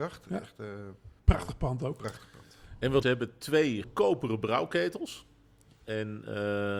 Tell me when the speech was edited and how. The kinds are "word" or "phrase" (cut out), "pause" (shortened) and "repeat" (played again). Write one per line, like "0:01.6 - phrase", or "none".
0:01.2 - pause
0:03.0 - phrase
0:03.8 - word